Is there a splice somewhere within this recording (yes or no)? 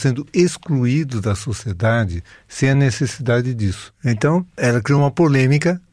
no